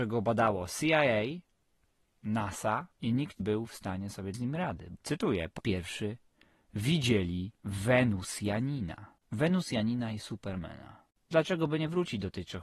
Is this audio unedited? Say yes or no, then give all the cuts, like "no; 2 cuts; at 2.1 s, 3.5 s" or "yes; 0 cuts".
no; 8 cuts; at 2.9 s, 3.4 s, 4.3 s, 5.0 s, 5.6 s, 7.6 s, 9.2 s, 11.3 s